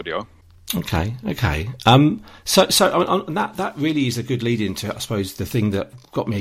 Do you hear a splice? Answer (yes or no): no